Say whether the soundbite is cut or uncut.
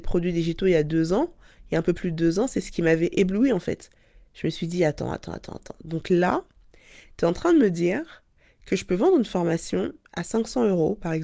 uncut